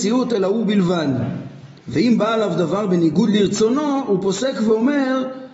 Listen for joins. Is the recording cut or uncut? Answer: cut